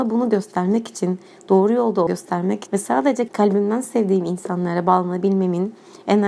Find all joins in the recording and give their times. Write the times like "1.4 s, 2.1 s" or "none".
2.1 s, 2.7 s, 3.3 s

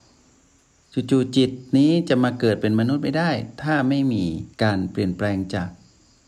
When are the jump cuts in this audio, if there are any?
4.5 s

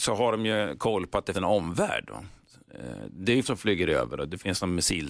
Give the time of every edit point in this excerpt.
1.3 s, 3.4 s

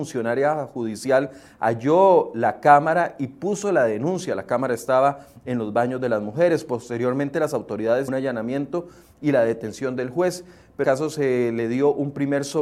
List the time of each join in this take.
8.1 s, 10.8 s

